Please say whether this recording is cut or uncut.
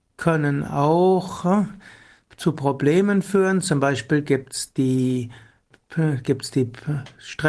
uncut